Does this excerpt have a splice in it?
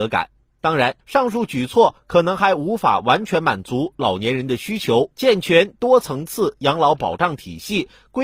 yes; 2 cuts; at 1.0 s, 5.1 s

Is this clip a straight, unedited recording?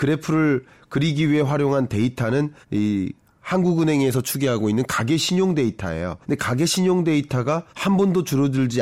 no; 3 cuts; at 2.6 s, 6.2 s, 7.7 s

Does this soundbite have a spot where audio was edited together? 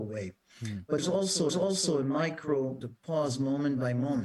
yes; 3 cuts; at 1.0 s, 1.5 s, 2.8 s

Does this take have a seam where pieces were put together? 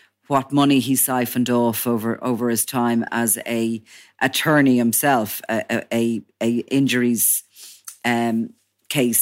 no; 0 cuts

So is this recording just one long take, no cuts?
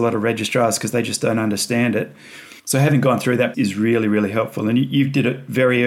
no; 2 cuts; at 2.6 s, 3.5 s

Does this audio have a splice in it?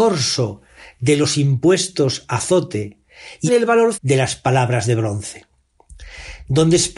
yes; 2 cuts; at 3.5 s, 3.9 s

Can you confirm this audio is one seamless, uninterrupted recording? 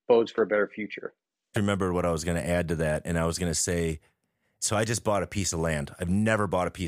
no; 1 cut; at 1.5 s

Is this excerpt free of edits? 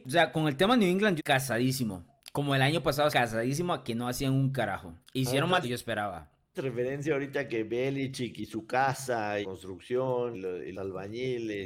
no; 8 cuts; at 1.2 s, 3.1 s, 5.0 s, 5.6 s, 6.5 s, 9.4 s, 10.3 s, 10.7 s

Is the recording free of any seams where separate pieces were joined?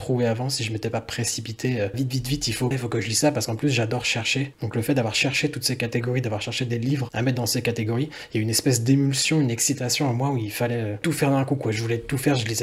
no; 2 cuts; at 1.9 s, 2.7 s

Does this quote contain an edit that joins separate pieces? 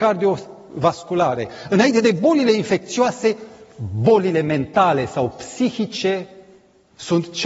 no; 0 cuts

